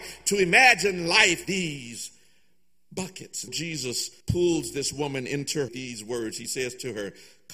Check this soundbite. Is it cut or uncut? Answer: cut